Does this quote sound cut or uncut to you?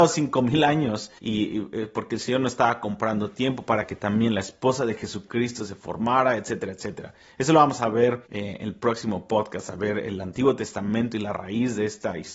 cut